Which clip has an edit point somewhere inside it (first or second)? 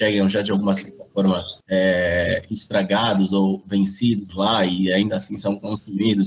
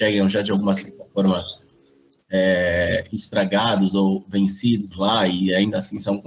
first